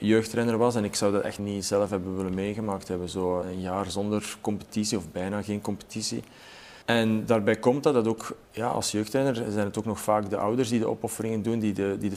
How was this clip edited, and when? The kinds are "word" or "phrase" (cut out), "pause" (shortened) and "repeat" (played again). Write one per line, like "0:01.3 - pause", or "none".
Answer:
0:01.4 - word
0:03.4 - word
0:06.8 - pause
0:08.4 - pause